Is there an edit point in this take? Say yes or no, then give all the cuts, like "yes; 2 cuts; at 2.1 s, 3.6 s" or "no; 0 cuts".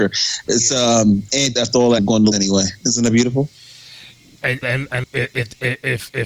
yes; 5 cuts; at 1.6 s, 2.0 s, 2.3 s, 4.6 s, 5.0 s